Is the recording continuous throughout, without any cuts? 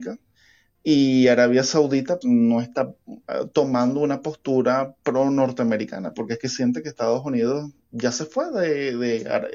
no; 1 cut; at 2.2 s

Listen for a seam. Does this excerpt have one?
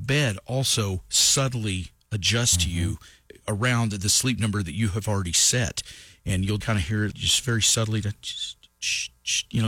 yes; 2 cuts; at 6.6 s, 7.1 s

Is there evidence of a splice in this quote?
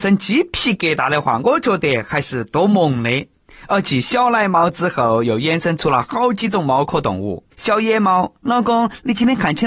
yes; 2 cuts; at 7.5 s, 8.4 s

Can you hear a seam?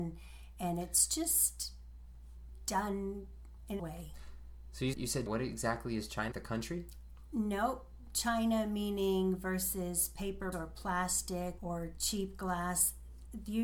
yes; 6 cuts; at 3.8 s, 4.9 s, 5.3 s, 6.3 s, 10.5 s, 11.6 s

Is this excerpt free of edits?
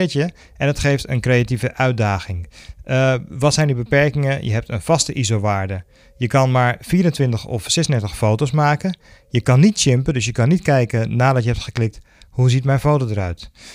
yes; 0 cuts

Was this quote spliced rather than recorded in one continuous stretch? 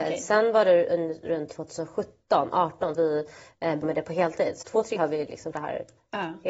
yes; 5 cuts; at 2.9 s, 3.8 s, 4.6 s, 5.0 s, 5.5 s

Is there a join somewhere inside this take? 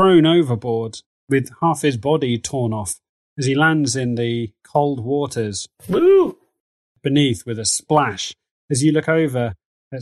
no; 0 cuts

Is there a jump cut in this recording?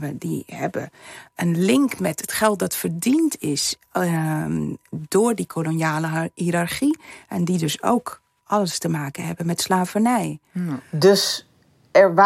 no; 0 cuts

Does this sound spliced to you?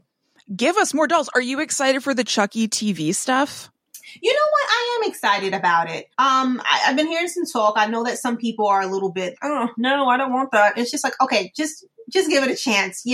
yes; 2 cuts; at 6.1 s, 9.4 s

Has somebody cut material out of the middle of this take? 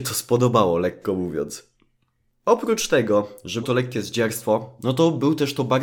yes; 1 cut; at 3.6 s

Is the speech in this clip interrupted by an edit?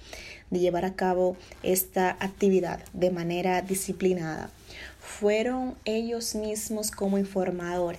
no; 0 cuts

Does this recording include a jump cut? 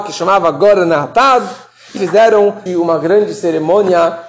yes; 2 cuts; at 2.0 s, 2.7 s

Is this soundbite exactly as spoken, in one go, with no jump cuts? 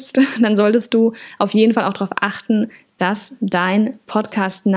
yes; 0 cuts

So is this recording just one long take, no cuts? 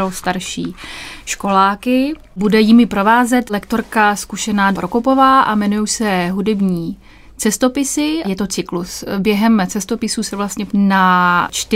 no; 3 cuts; at 4.7 s, 8.2 s, 10.7 s

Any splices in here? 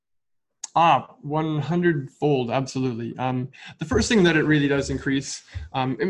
no; 0 cuts

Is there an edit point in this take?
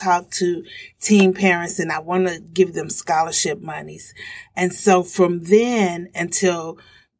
no; 0 cuts

